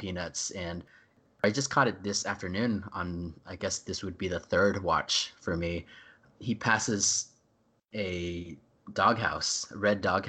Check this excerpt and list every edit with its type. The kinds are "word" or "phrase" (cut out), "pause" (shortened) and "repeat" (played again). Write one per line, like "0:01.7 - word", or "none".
none